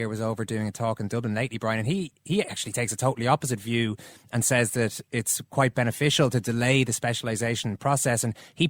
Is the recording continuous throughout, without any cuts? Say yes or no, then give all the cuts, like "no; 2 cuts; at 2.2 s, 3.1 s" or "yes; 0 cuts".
yes; 0 cuts